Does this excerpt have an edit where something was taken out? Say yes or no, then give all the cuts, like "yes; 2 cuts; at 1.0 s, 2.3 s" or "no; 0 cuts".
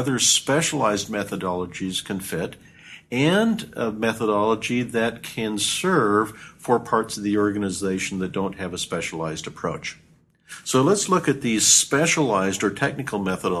no; 0 cuts